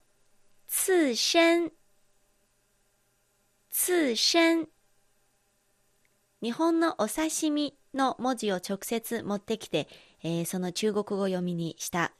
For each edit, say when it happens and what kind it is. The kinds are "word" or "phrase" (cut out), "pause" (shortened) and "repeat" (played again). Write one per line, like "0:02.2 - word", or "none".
none